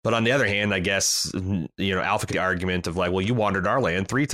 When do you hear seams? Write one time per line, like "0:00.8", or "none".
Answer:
0:02.3